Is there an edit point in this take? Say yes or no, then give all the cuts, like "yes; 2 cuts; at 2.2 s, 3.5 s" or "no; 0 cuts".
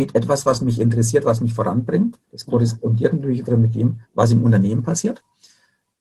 yes; 2 cuts; at 2.2 s, 4.0 s